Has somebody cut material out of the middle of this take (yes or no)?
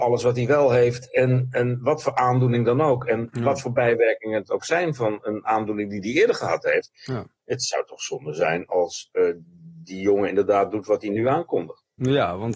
no